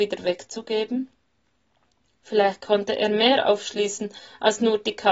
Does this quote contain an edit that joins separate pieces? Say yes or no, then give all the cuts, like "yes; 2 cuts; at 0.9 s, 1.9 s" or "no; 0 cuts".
no; 0 cuts